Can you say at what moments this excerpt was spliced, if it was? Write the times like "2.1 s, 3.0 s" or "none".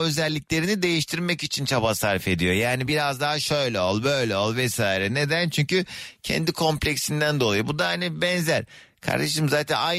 none